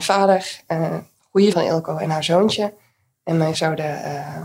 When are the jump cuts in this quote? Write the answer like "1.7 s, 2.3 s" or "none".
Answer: 1.5 s, 3.5 s